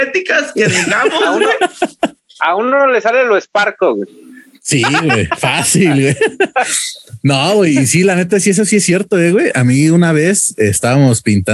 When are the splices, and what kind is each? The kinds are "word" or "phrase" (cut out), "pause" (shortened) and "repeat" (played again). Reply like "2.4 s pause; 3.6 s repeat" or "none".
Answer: none